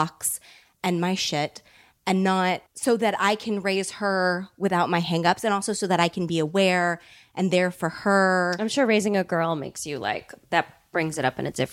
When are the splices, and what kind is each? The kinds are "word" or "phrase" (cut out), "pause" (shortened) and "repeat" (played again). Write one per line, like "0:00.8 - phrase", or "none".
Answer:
0:02.7 - pause